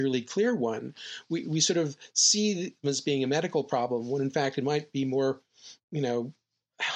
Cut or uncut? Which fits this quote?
cut